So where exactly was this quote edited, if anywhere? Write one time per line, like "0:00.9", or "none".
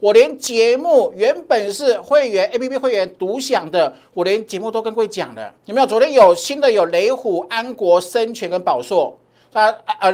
0:05.6